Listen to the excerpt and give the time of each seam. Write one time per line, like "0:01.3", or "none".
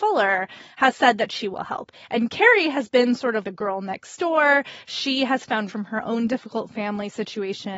0:03.4
0:05.7